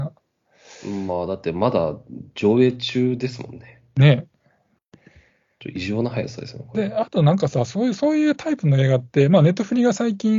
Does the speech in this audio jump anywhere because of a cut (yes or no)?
no